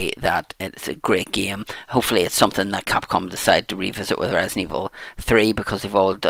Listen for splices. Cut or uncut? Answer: uncut